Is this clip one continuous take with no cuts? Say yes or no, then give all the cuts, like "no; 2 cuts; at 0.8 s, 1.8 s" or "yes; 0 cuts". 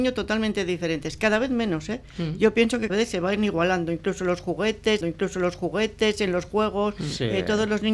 no; 2 cuts; at 2.9 s, 5.0 s